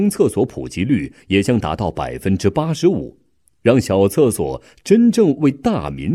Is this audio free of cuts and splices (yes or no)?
yes